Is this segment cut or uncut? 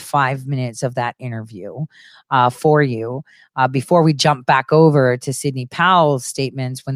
uncut